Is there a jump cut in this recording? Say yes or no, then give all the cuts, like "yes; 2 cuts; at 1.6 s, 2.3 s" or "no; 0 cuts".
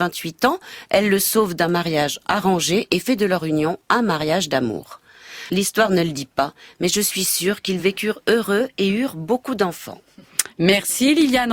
no; 0 cuts